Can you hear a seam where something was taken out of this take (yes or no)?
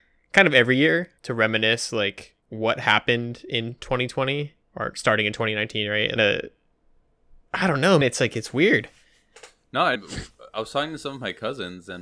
yes